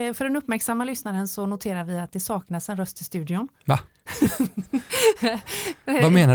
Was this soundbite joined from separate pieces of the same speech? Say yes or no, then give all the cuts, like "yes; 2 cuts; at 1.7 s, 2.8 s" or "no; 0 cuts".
no; 0 cuts